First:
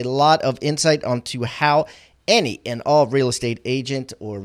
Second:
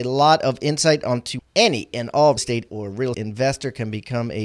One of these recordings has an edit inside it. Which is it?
second; 4 cuts; at 1.4 s, 2.4 s, 2.7 s, 3.1 s

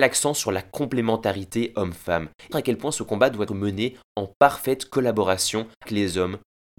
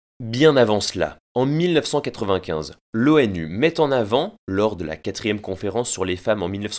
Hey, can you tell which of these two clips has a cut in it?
first; 3 cuts; at 2.5 s, 3.5 s, 5.9 s

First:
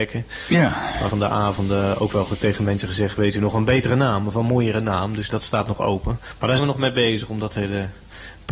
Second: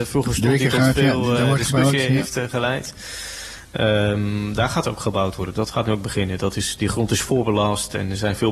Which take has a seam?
first; 3 cuts; at 1.1 s, 5.3 s, 6.6 s

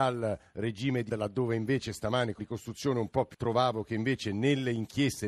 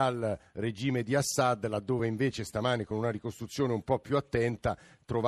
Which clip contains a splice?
first; 3 cuts; at 1.1 s, 2.4 s, 3.3 s

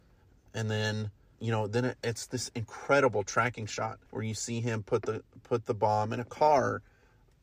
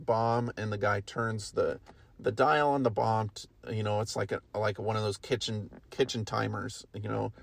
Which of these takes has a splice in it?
first; 2 cuts; at 1.3 s, 4.1 s

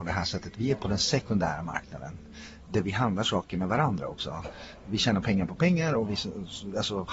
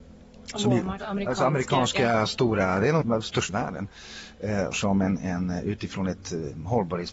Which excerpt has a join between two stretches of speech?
second; 4 cuts; at 1.0 s, 3.0 s, 3.5 s, 4.7 s

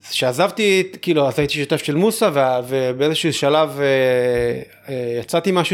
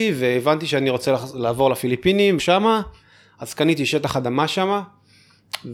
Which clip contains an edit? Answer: second; 1 cut; at 2.4 s

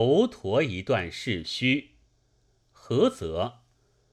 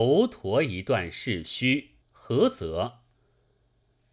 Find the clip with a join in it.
second; 1 cut; at 2.0 s

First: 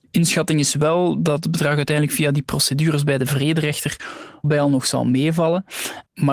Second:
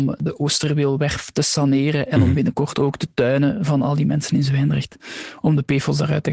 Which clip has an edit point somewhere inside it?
first; 1 cut; at 4.4 s

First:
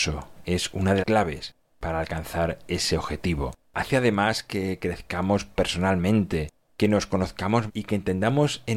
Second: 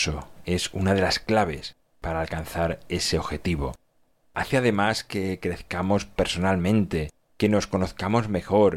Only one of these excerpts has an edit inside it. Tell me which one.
first; 3 cuts; at 1.0 s, 3.6 s, 7.7 s

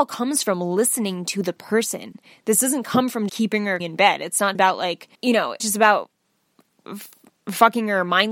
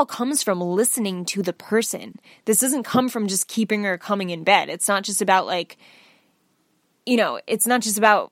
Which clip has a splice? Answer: first; 5 cuts; at 3.3 s, 3.8 s, 4.5 s, 5.1 s, 5.6 s

